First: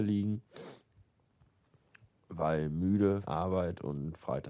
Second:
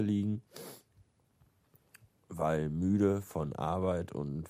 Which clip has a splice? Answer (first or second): first